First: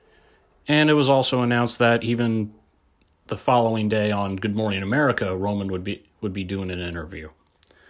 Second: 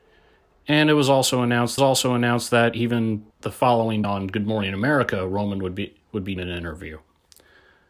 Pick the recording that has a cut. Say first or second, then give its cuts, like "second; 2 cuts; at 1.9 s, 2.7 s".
second; 4 cuts; at 1.8 s, 3.3 s, 4.0 s, 6.4 s